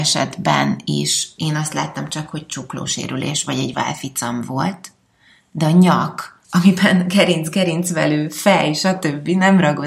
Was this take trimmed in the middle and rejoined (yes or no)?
yes